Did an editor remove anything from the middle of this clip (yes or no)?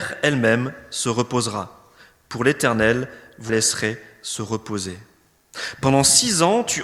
yes